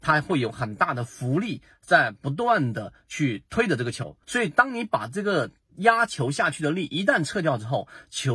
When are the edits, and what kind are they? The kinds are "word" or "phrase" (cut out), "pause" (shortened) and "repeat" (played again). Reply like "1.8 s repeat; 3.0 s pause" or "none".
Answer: 4.2 s pause